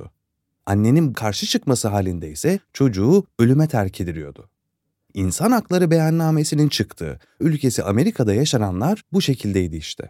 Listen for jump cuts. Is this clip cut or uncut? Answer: cut